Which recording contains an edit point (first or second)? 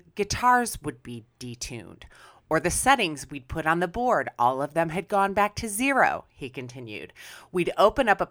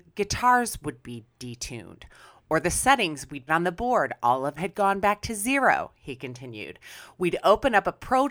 second